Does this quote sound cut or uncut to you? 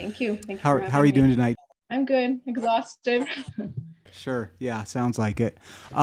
uncut